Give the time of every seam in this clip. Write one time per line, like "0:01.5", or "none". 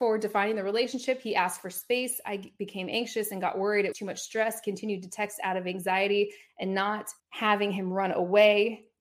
0:03.9
0:07.2